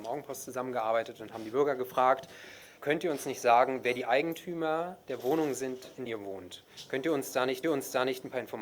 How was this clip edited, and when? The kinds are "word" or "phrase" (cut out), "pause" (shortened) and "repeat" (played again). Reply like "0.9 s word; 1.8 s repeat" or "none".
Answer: 2.8 s word; 6.1 s word; 7.6 s repeat